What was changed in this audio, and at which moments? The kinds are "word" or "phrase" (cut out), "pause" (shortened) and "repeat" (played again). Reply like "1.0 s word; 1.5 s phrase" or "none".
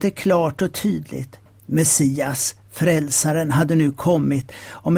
none